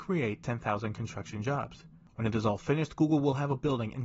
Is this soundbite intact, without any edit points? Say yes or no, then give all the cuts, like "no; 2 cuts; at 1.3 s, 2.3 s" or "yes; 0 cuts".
yes; 0 cuts